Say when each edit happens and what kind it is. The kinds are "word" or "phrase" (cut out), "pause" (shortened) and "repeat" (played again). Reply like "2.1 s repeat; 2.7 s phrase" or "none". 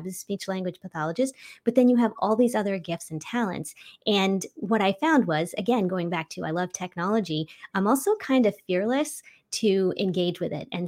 none